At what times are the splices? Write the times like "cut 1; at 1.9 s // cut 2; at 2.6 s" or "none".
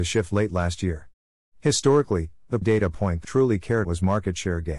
cut 1; at 2.6 s // cut 2; at 3.2 s // cut 3; at 3.8 s